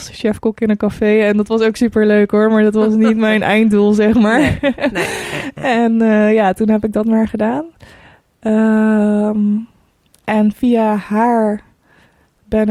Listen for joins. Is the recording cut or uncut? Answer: uncut